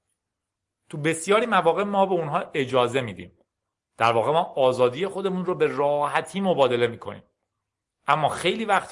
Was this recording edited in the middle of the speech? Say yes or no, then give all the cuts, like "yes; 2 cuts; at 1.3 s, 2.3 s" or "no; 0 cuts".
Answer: no; 0 cuts